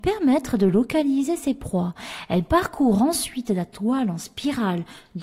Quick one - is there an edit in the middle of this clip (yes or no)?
no